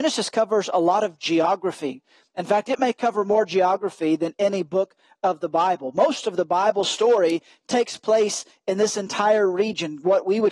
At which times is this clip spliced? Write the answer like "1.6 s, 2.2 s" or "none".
none